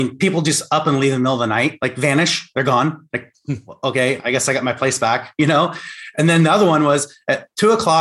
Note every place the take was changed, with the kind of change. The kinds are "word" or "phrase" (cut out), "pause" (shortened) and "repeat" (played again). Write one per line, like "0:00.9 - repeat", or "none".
none